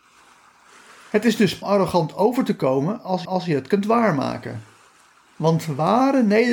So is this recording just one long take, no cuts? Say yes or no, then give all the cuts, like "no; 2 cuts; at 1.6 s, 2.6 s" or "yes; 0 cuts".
no; 2 cuts; at 1.6 s, 3.2 s